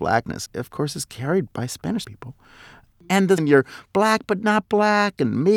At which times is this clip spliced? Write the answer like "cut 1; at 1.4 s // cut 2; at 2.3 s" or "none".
cut 1; at 1.5 s // cut 2; at 2.0 s // cut 3; at 3.4 s